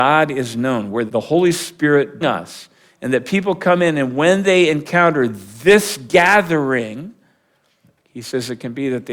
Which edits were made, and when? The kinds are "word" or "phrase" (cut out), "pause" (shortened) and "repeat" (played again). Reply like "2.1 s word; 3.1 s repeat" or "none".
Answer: 1.1 s word; 2.2 s phrase